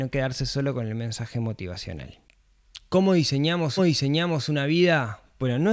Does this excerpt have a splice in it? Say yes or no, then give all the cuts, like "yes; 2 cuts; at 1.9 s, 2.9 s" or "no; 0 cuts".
yes; 1 cut; at 3.8 s